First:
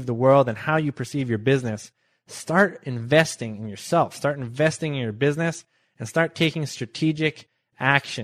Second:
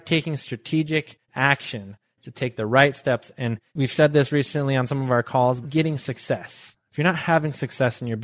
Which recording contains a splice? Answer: second; 3 cuts; at 1.2 s, 3.7 s, 5.6 s

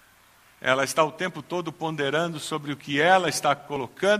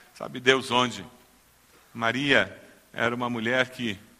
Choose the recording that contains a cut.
second; 1 cut; at 1.6 s

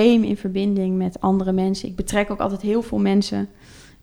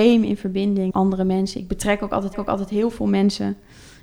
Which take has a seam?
second; 2 cuts; at 0.9 s, 2.3 s

